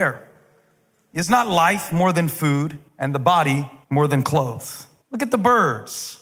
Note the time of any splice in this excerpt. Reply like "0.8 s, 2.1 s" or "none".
2.9 s, 3.8 s, 5.0 s